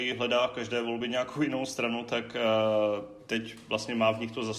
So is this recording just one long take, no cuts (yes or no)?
yes